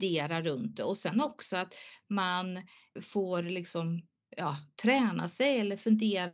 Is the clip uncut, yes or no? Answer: yes